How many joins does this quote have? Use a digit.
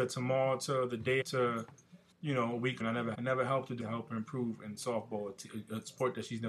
5